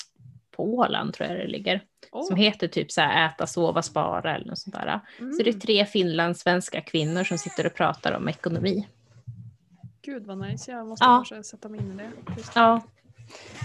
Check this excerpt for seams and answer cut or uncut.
uncut